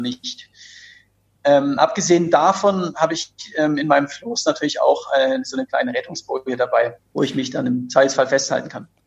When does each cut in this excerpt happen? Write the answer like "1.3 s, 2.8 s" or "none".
none